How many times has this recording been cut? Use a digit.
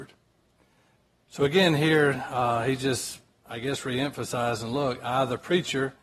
0